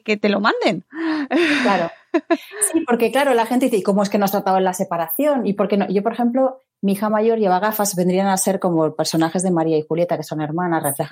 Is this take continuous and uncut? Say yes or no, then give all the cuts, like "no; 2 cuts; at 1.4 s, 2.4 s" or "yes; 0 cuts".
yes; 0 cuts